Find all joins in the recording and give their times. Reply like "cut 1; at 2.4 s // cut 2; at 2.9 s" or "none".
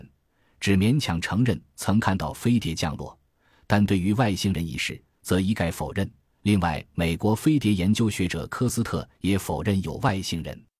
none